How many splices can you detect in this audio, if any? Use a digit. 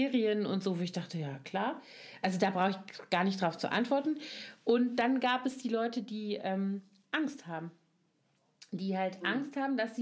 0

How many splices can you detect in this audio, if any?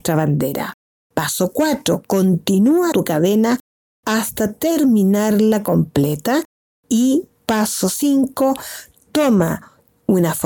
1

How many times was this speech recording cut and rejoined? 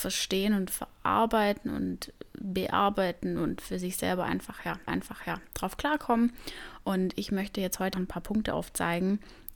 2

